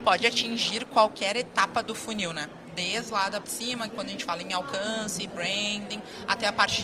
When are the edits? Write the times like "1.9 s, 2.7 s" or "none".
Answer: 3.4 s, 3.9 s